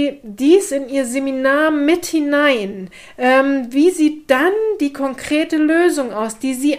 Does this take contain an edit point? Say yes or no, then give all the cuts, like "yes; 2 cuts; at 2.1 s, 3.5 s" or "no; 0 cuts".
no; 0 cuts